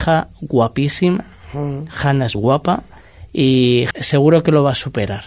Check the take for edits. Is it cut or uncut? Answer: cut